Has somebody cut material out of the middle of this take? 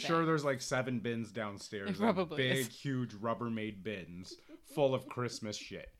no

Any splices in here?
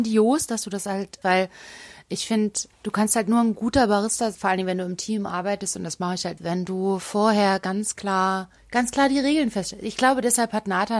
yes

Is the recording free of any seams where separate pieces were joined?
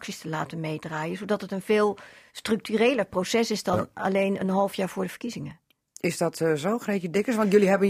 yes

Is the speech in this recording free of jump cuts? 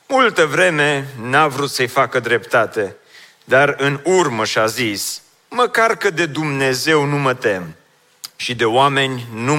yes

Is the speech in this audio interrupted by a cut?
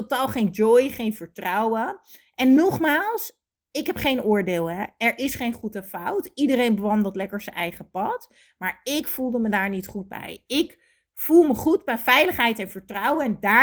no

